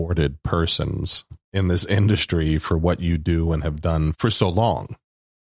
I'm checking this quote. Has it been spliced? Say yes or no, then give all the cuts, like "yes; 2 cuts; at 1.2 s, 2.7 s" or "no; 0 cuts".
no; 0 cuts